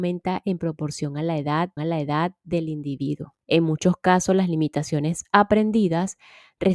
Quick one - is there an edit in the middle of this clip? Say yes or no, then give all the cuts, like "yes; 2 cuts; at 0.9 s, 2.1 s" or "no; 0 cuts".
yes; 2 cuts; at 1.8 s, 3.4 s